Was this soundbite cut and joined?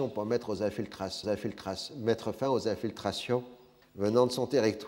yes; 2 cuts; at 1.2 s, 3.8 s

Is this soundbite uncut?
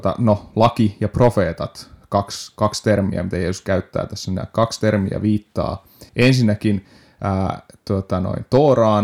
no; 1 cut; at 6.1 s

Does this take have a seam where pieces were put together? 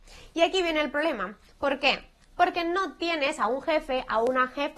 no; 0 cuts

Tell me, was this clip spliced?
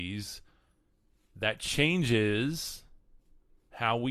no; 0 cuts

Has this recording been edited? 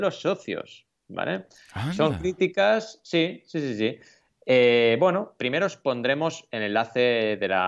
yes; 1 cut; at 5.4 s

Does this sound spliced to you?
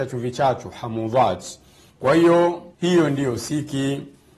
yes; 1 cut; at 2.7 s

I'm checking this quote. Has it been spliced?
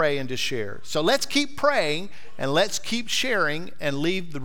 no; 0 cuts

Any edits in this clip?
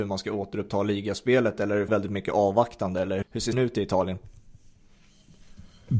yes; 3 cuts; at 1.9 s, 3.2 s, 3.5 s

